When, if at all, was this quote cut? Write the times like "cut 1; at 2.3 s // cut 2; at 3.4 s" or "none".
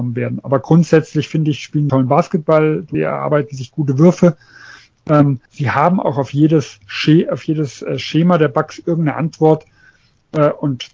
cut 1; at 1.9 s // cut 2; at 2.9 s // cut 3; at 5.5 s

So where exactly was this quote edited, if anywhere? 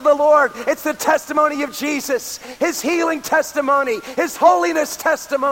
none

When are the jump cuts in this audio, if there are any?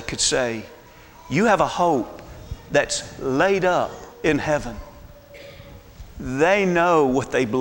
cut 1; at 4.1 s

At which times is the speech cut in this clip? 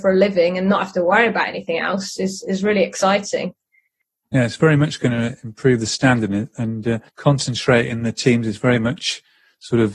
cut 1; at 7.1 s

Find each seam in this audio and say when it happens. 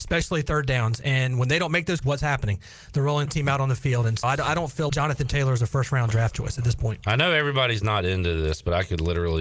cut 1; at 2.0 s // cut 2; at 3.3 s // cut 3; at 4.2 s // cut 4; at 4.9 s

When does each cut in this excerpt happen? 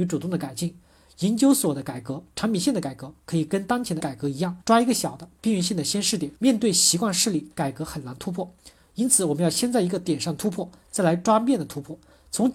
cut 1; at 4.0 s // cut 2; at 4.6 s // cut 3; at 6.4 s

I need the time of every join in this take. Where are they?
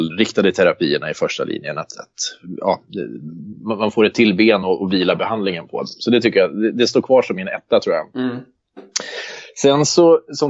none

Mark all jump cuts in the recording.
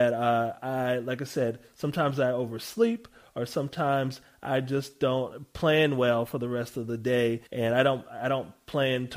cut 1; at 7.5 s

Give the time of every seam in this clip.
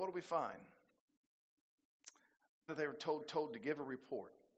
cut 1; at 2.7 s // cut 2; at 3.2 s

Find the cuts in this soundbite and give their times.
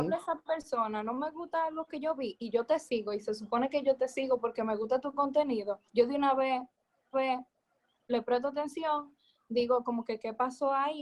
cut 1; at 5.9 s // cut 2; at 7.1 s

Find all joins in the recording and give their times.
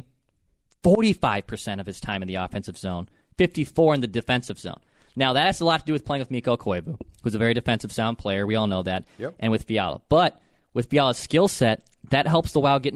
none

